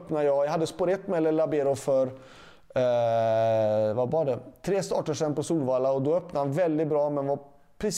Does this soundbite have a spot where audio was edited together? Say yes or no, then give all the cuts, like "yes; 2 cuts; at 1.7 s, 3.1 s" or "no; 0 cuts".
no; 0 cuts